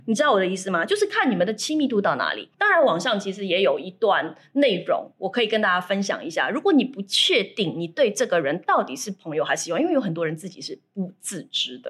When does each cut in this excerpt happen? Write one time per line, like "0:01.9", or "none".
0:02.5